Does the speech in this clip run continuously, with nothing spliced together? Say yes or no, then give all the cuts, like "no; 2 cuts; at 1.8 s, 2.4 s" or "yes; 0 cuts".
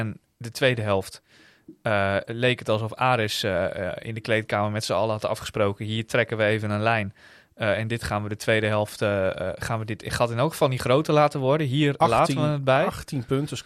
yes; 0 cuts